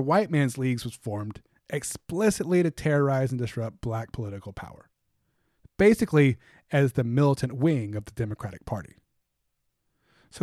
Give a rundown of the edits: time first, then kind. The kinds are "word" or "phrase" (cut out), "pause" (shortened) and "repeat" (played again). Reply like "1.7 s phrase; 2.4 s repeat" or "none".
none